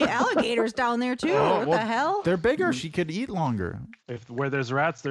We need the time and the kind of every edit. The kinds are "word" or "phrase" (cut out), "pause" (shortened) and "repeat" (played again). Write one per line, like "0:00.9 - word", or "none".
0:04.0 - pause